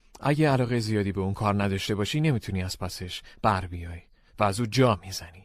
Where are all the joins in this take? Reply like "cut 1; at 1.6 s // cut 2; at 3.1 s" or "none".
none